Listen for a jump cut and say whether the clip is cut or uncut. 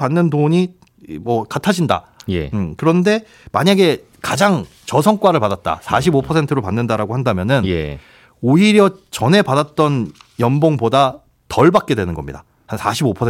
uncut